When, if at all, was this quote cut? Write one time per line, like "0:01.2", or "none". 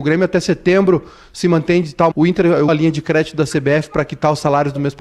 0:02.1
0:02.7